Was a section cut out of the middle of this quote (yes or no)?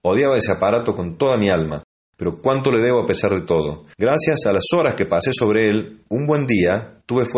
no